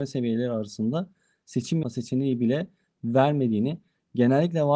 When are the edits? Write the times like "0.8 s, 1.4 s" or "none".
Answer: 1.8 s